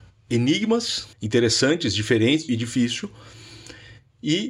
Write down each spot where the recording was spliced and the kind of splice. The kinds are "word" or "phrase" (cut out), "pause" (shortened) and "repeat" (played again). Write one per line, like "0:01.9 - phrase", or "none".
0:01.1 - pause
0:02.5 - phrase

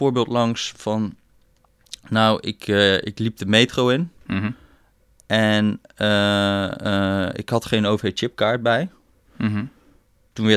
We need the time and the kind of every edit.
none

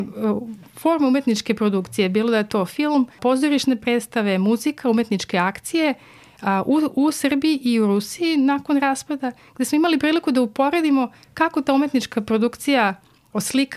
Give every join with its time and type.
none

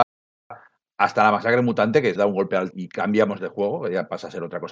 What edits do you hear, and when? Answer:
0:02.2 - word
0:02.7 - word

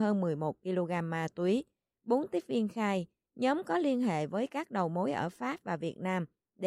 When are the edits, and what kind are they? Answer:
none

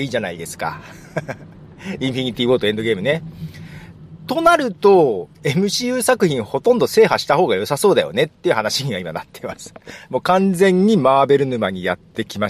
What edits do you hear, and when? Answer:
0:05.3 - pause

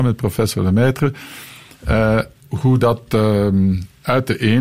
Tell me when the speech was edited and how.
0:02.4 - pause

